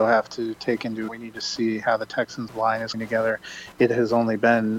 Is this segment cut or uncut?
cut